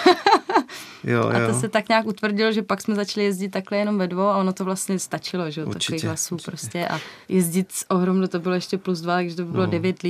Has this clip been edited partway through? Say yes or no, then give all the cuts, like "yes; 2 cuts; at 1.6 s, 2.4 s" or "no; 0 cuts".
yes; 1 cut; at 7.2 s